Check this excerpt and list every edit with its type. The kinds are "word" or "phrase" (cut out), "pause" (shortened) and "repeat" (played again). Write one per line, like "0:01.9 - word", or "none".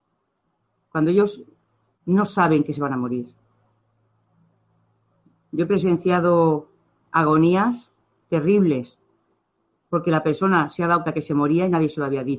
0:11.0 - word